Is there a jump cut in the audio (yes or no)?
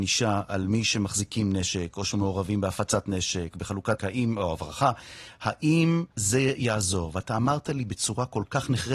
yes